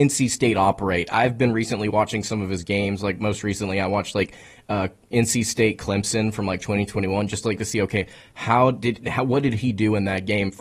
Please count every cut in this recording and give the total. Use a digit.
0